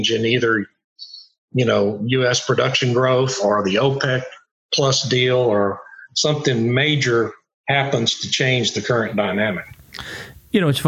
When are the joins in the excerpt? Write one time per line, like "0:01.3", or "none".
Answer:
none